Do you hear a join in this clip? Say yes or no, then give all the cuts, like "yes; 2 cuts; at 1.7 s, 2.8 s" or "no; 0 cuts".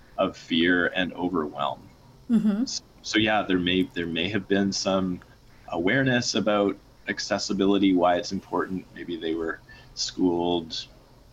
no; 0 cuts